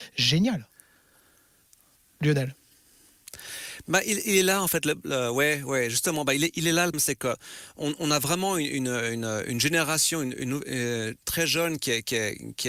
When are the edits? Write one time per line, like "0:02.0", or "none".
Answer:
0:06.9

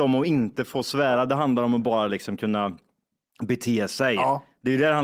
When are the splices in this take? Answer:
none

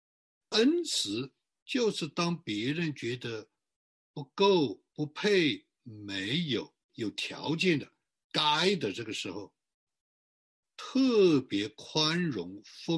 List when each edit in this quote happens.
0:01.5
0:04.9
0:06.8

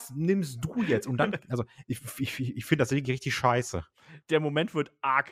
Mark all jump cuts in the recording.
0:04.2

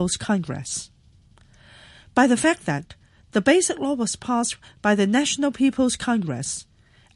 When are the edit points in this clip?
none

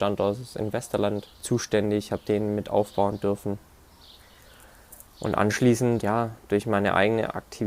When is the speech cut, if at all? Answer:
0:01.3
0:06.0

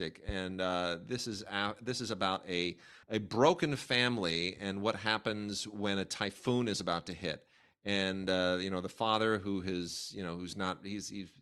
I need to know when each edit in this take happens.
0:03.0

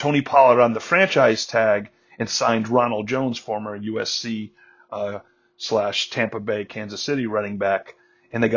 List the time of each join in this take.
none

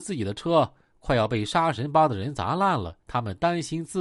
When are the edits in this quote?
0:03.0

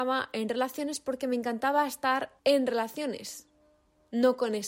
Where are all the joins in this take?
0:02.4

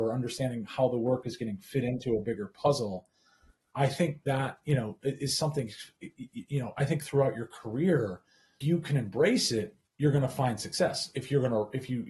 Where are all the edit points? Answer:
0:08.6

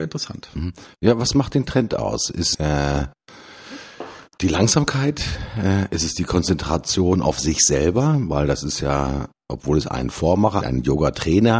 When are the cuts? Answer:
0:02.5
0:10.6

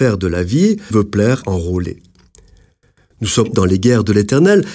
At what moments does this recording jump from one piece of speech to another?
0:00.9
0:01.4
0:03.5

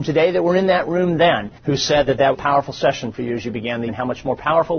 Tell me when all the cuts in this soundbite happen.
0:01.6
0:02.3
0:03.9

